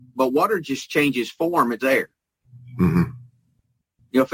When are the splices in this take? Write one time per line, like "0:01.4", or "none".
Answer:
0:01.8